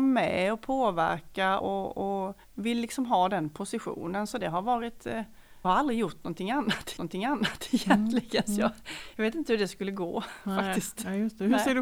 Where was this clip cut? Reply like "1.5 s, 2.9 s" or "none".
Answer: 1.6 s, 2.4 s, 5.6 s, 7.0 s